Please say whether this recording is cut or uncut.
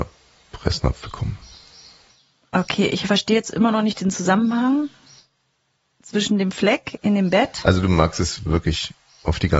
uncut